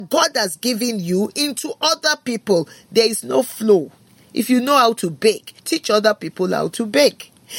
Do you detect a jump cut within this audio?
yes; 1 cut; at 5.6 s

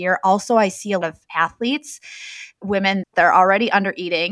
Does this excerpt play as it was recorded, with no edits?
no; 2 cuts; at 1.0 s, 3.0 s

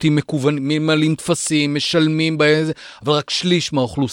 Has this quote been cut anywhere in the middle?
no; 0 cuts

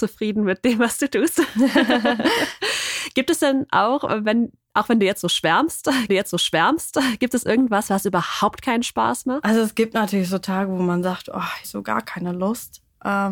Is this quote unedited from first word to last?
no; 2 cuts; at 6.1 s, 11.6 s

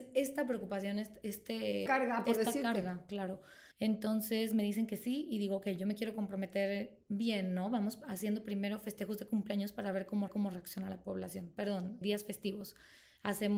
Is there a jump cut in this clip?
yes; 4 cuts; at 1.9 s, 3.7 s, 10.3 s, 12.0 s

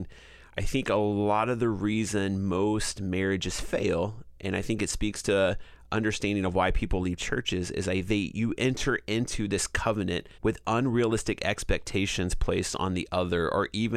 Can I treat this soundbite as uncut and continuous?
no; 1 cut; at 10.3 s

